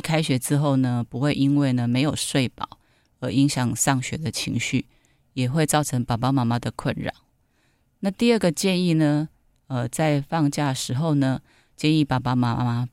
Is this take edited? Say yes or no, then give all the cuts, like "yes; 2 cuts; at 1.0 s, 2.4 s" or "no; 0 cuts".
no; 0 cuts